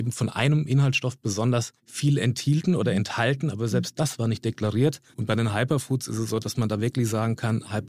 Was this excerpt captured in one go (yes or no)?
no